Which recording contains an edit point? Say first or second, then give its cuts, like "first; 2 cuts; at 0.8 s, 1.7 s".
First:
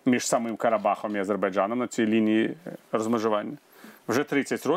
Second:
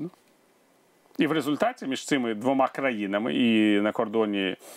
first; 1 cut; at 2.8 s